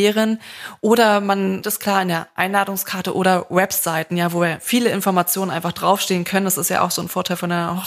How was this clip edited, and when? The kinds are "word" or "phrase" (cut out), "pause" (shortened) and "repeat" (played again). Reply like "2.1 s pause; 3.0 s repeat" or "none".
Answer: 1.6 s word